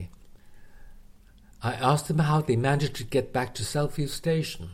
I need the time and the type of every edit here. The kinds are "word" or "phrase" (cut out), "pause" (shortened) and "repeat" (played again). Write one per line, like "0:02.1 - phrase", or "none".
none